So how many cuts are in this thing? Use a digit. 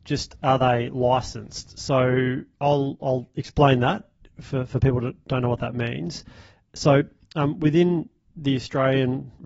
0